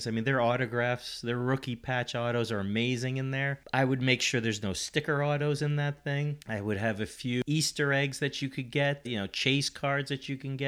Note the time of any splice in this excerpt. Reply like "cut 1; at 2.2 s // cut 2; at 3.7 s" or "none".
cut 1; at 9.0 s

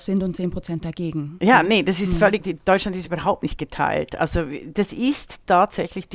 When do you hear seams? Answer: cut 1; at 2.4 s

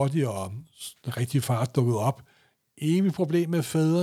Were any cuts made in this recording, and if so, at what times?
none

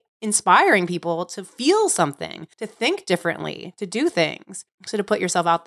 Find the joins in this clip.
cut 1; at 2.5 s // cut 2; at 4.7 s

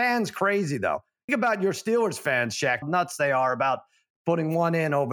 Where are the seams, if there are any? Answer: cut 1; at 1.3 s // cut 2; at 2.8 s

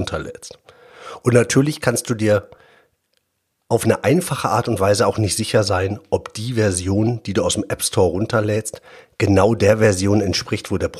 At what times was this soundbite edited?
none

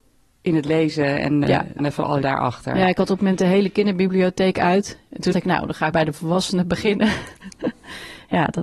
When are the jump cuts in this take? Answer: cut 1; at 1.4 s // cut 2; at 1.8 s // cut 3; at 2.2 s // cut 4; at 3.2 s // cut 5; at 5.3 s // cut 6; at 5.9 s

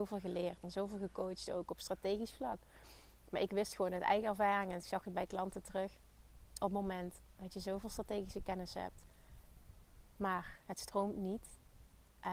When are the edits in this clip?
none

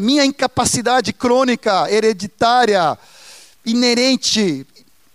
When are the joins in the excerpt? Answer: none

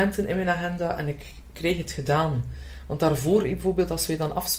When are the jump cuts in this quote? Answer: none

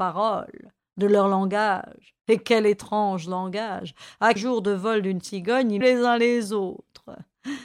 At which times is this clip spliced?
cut 1; at 2.2 s // cut 2; at 4.4 s // cut 3; at 5.8 s

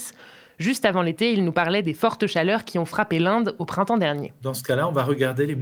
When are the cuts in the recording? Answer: none

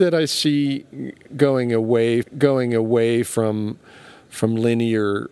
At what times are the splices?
cut 1; at 2.2 s

